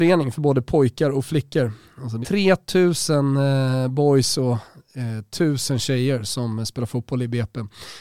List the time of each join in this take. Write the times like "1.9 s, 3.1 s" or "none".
2.2 s